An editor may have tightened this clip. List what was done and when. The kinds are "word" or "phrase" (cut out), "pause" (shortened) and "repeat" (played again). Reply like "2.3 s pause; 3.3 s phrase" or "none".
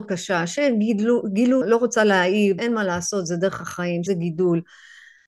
1.6 s phrase; 2.6 s word; 4.1 s phrase